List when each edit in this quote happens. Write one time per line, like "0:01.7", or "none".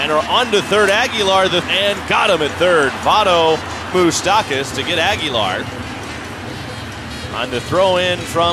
0:01.6
0:03.9